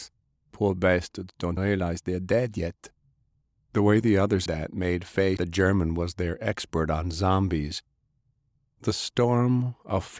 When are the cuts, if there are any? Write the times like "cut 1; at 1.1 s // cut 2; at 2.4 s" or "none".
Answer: cut 1; at 1.6 s // cut 2; at 4.5 s // cut 3; at 5.4 s